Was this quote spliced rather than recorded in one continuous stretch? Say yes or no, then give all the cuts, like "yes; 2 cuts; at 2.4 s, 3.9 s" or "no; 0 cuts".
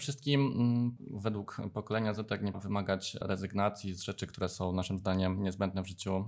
yes; 2 cuts; at 1.0 s, 2.5 s